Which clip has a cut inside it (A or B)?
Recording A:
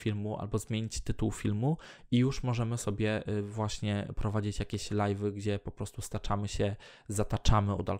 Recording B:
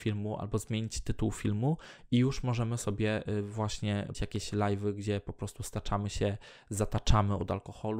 B